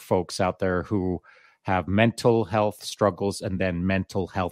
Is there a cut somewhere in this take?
no; 0 cuts

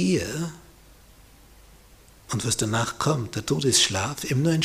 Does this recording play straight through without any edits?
yes; 0 cuts

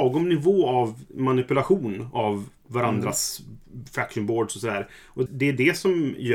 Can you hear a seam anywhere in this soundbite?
yes; 1 cut; at 5.3 s

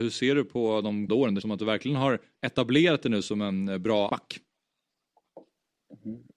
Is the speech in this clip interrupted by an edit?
yes; 3 cuts; at 1.1 s, 1.4 s, 4.1 s

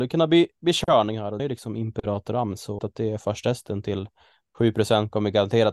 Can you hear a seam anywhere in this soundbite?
yes; 2 cuts; at 1.4 s, 2.8 s

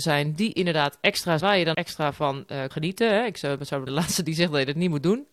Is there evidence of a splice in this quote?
yes; 4 cuts; at 1.4 s, 1.7 s, 2.7 s, 3.9 s

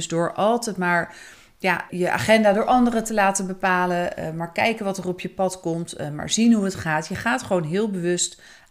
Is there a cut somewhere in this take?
yes; 1 cut; at 1.9 s

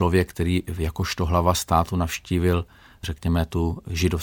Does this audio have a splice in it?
no; 0 cuts

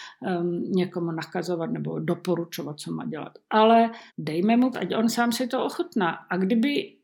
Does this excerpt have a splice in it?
yes; 2 cuts; at 4.1 s, 4.7 s

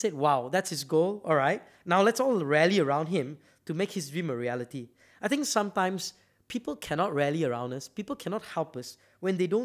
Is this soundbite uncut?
yes; 0 cuts

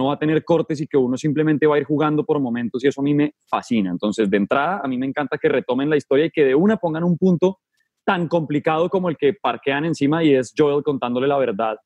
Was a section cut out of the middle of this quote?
no; 0 cuts

